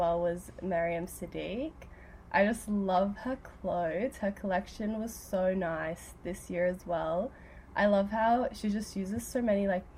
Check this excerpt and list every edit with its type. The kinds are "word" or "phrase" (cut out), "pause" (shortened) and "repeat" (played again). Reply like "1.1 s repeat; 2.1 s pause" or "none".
none

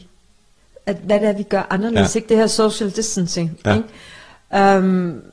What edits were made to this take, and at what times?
none

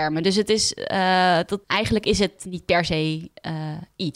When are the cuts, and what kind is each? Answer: 1.6 s pause

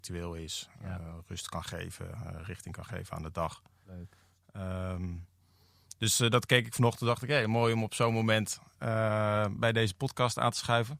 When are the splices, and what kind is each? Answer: none

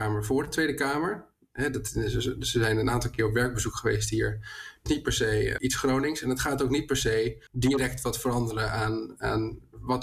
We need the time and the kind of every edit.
4.9 s phrase; 5.6 s word; 7.5 s pause

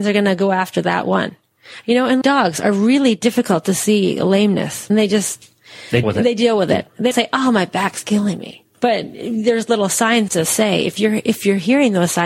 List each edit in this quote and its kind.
2.2 s word; 4.9 s phrase; 6.0 s word; 7.1 s word; 8.7 s pause; 10.3 s phrase

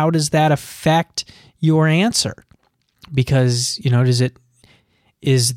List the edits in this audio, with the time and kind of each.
none

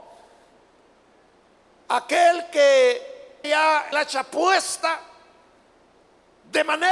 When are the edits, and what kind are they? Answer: 3.4 s word; 3.9 s word

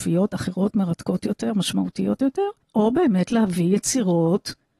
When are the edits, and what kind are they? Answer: 2.6 s pause

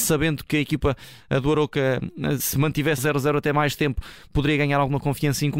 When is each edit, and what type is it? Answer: 2.4 s word; 3.0 s word

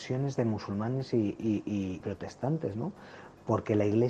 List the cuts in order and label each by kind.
2.0 s word

